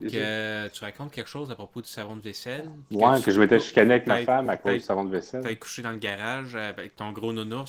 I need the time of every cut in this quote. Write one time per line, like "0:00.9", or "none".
none